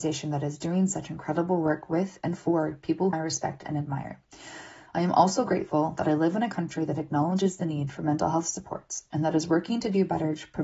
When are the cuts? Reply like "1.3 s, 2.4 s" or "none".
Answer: 3.1 s